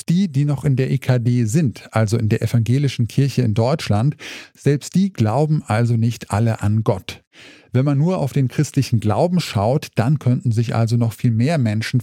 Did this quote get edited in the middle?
no; 0 cuts

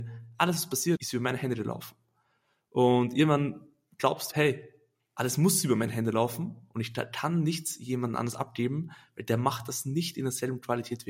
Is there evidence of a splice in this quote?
yes; 2 cuts; at 1.0 s, 4.3 s

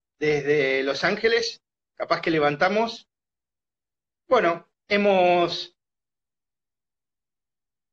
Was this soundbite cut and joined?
no; 0 cuts

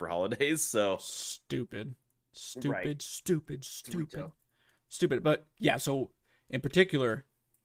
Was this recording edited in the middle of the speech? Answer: no; 0 cuts

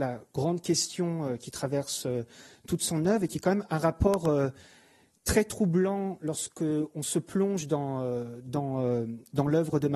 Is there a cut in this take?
no; 0 cuts

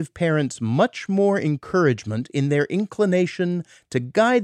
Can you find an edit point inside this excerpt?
no; 0 cuts

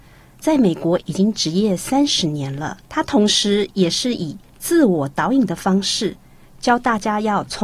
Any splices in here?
yes; 1 cut; at 2.8 s

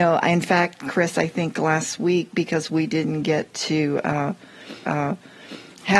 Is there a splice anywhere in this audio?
yes; 1 cut; at 4.8 s

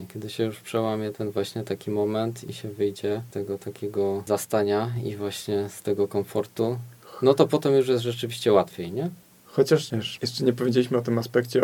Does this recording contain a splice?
no; 0 cuts

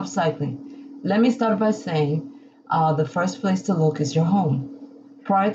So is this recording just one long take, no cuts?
yes; 0 cuts

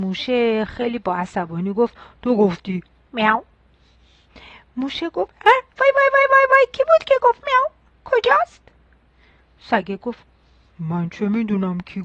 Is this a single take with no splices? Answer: yes; 0 cuts

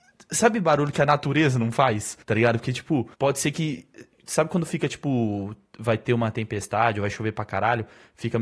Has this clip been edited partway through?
yes; 2 cuts; at 2.2 s, 3.1 s

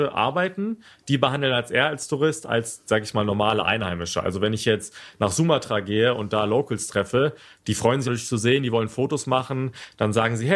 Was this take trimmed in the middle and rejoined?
yes; 1 cut; at 8.1 s

